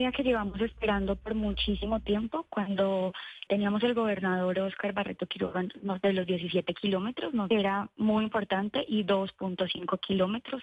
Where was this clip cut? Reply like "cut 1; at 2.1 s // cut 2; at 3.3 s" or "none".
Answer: cut 1; at 3.5 s // cut 2; at 7.5 s